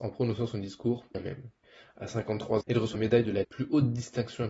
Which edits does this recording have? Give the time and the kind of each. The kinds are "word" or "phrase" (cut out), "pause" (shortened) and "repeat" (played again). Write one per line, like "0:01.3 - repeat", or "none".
0:01.1 - phrase
0:01.6 - pause
0:02.6 - word
0:02.9 - word
0:03.4 - word